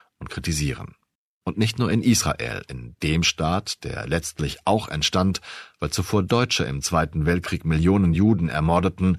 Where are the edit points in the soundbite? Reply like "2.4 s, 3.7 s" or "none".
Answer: none